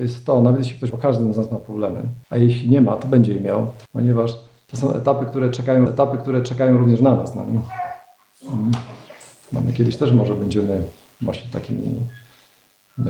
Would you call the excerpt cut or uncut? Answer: cut